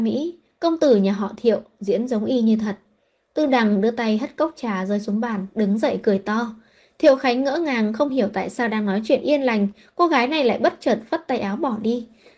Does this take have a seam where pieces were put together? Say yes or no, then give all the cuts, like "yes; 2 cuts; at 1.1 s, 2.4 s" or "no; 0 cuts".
no; 0 cuts